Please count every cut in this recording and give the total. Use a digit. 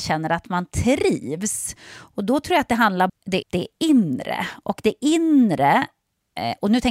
2